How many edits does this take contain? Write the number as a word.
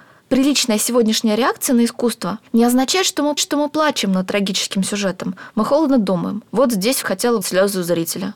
five